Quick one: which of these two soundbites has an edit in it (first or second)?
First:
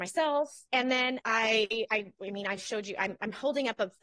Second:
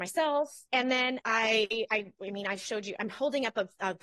second